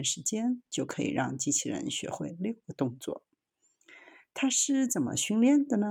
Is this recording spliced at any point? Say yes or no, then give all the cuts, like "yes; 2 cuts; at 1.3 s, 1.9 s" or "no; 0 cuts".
no; 0 cuts